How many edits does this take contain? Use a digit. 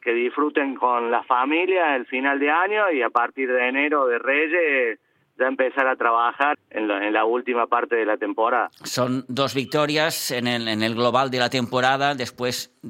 1